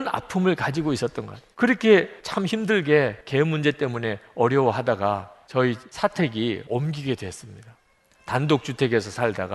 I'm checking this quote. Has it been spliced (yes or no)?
yes